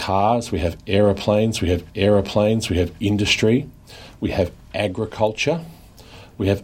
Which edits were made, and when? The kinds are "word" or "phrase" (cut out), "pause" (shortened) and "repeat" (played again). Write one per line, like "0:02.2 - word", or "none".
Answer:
0:01.9 - repeat

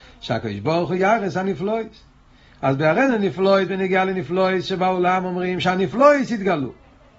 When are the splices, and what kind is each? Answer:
none

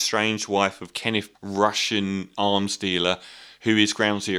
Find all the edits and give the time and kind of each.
0:01.3 - word
0:02.3 - pause

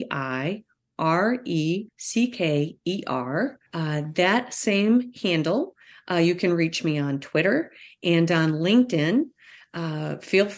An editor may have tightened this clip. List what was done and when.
0:01.9 - word
0:03.7 - pause

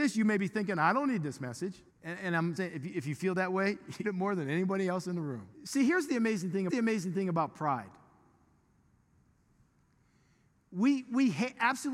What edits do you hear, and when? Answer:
0:01.9 - pause
0:02.6 - word
0:04.0 - phrase
0:05.5 - pause
0:06.7 - repeat

